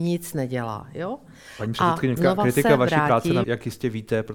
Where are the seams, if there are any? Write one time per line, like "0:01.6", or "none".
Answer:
0:02.2
0:03.4